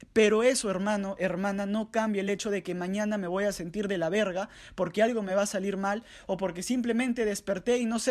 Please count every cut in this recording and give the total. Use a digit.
0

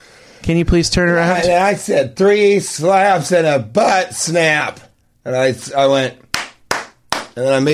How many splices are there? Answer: 0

